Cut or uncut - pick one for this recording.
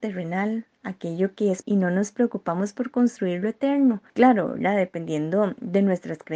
cut